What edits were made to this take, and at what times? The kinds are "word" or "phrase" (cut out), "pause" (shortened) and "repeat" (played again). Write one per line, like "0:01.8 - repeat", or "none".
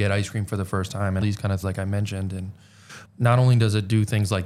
0:01.2 - word
0:01.6 - word
0:03.0 - word